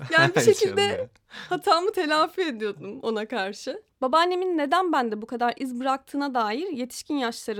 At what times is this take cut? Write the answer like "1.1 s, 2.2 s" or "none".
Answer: 3.9 s